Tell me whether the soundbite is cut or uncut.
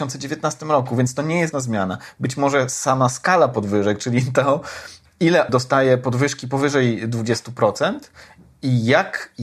cut